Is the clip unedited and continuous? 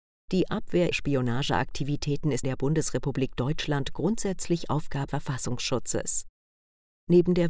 no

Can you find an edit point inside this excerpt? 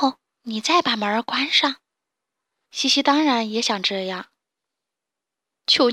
no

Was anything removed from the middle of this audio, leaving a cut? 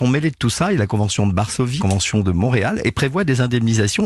yes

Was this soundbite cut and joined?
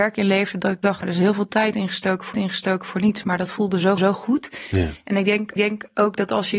yes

